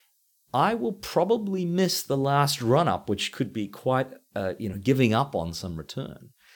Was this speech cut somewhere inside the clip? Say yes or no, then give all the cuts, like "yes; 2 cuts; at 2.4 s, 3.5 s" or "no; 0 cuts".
no; 0 cuts